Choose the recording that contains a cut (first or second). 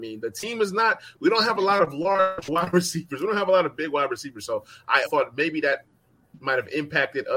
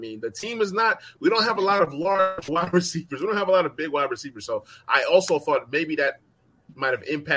first